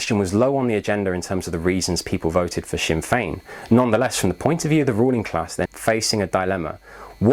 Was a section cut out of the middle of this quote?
yes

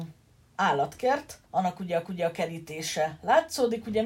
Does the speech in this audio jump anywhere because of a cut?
yes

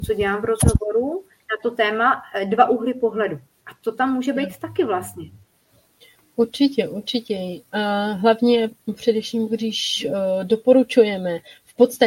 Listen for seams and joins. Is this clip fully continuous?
yes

